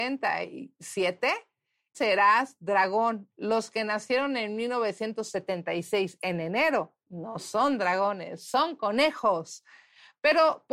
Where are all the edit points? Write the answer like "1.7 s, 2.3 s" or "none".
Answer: 1.9 s, 7.0 s